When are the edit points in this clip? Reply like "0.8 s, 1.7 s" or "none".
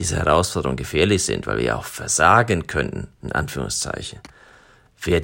3.2 s